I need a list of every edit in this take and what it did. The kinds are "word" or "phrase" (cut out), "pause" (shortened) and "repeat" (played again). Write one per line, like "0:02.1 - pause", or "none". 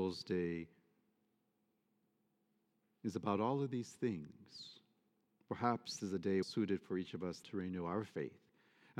0:06.0 - word
0:06.4 - word
0:07.4 - word